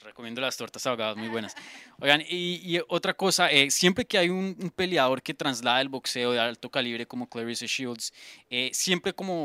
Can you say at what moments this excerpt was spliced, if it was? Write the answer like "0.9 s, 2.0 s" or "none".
none